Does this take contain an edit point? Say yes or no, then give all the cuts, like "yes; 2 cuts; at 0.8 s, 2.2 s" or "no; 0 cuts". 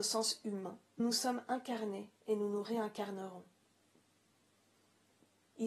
yes; 1 cut; at 1.0 s